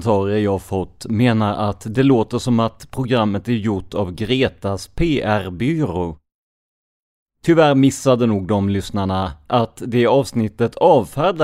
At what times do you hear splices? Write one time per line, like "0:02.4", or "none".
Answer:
none